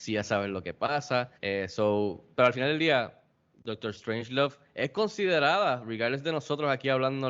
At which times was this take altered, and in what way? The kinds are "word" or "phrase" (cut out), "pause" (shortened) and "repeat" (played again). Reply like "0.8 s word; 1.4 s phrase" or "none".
1.3 s pause; 2.3 s pause